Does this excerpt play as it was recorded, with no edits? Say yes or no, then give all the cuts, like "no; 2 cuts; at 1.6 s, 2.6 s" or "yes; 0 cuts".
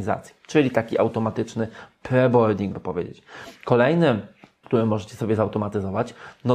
no; 2 cuts; at 2.7 s, 4.6 s